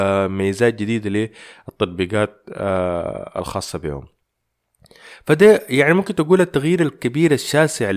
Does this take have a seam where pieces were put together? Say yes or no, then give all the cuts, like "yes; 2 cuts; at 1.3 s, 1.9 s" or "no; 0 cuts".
no; 0 cuts